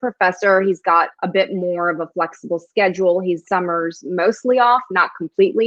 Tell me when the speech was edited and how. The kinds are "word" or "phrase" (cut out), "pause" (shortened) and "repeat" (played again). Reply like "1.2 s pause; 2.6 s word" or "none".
1.1 s pause; 3.4 s word